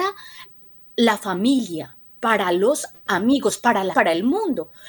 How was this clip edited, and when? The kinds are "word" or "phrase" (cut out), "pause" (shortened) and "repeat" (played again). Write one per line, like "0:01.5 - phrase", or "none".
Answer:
0:03.9 - word